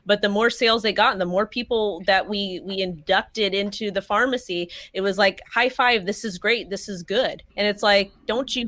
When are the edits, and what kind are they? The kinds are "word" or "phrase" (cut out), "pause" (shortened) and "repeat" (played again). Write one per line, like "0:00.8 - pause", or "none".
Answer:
0:07.5 - pause